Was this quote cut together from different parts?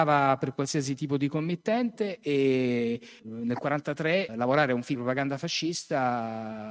yes; 3 cuts; at 3.2 s, 4.3 s, 4.9 s

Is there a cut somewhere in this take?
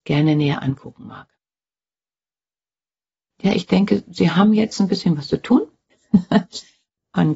no; 0 cuts

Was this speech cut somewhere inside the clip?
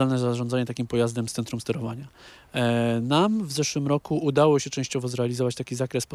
no; 0 cuts

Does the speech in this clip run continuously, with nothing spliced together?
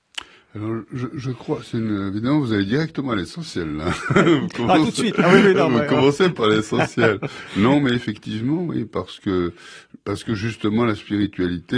yes; 0 cuts

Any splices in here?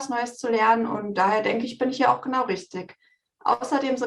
no; 0 cuts

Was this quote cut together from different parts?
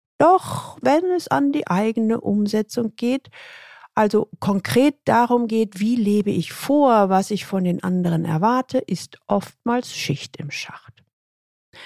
no; 0 cuts

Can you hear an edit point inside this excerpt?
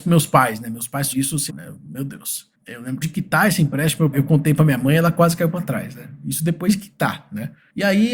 yes; 4 cuts; at 1.1 s, 1.5 s, 3.0 s, 4.1 s

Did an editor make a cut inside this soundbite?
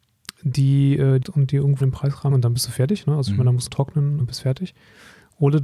yes; 5 cuts; at 1.2 s, 1.8 s, 2.3 s, 3.7 s, 4.2 s

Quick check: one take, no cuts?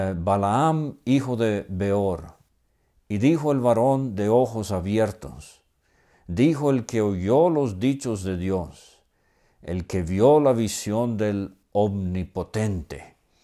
yes; 0 cuts

